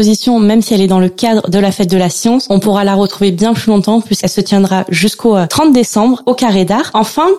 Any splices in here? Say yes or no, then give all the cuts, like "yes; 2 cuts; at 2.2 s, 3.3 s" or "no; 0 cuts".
no; 0 cuts